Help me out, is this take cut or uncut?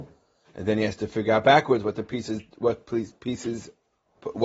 uncut